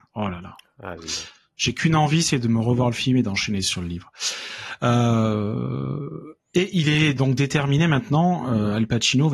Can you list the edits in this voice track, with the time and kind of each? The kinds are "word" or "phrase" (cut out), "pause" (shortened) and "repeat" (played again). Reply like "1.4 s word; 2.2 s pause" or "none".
none